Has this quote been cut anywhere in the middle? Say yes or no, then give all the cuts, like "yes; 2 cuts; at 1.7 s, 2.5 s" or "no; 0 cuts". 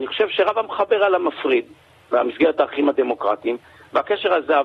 no; 0 cuts